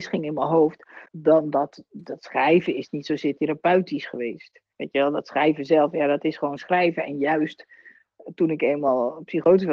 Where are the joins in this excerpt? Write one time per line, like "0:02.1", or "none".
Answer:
0:01.1
0:04.7